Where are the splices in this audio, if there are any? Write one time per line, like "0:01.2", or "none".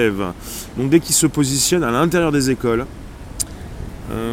0:01.0